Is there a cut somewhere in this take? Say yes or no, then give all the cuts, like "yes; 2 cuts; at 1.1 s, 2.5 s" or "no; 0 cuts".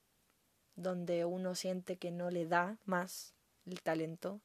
no; 0 cuts